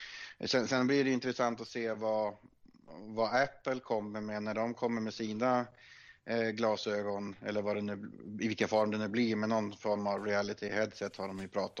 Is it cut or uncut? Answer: uncut